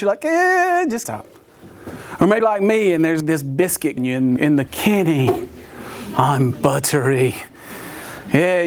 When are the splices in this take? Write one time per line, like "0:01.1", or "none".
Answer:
0:01.0
0:02.4
0:03.2
0:04.0
0:04.4
0:04.7

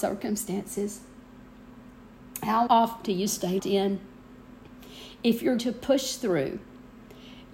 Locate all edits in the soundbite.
0:02.7
0:03.0
0:03.6
0:05.6

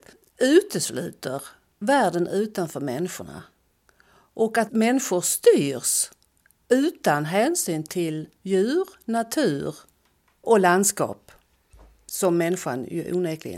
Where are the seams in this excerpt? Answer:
none

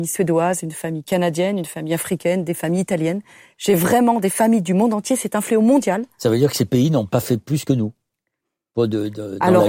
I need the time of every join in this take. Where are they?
none

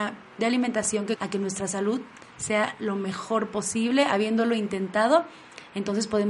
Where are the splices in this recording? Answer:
0:01.2

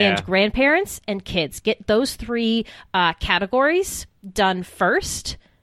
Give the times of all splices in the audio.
none

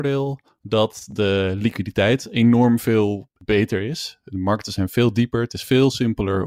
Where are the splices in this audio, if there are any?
0:03.4

